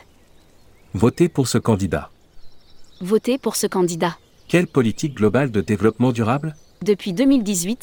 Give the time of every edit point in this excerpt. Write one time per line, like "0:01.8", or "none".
0:04.3
0:06.7